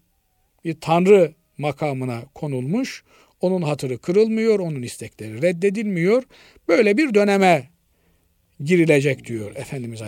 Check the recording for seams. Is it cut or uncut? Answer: uncut